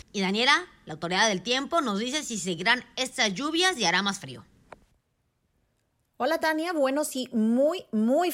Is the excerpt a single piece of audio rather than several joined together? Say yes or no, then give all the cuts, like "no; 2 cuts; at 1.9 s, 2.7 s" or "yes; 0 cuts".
yes; 0 cuts